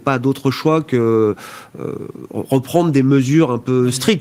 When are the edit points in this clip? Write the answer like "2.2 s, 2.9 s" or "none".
none